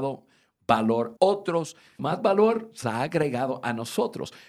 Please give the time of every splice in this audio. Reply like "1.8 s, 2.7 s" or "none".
1.2 s, 2.0 s, 2.8 s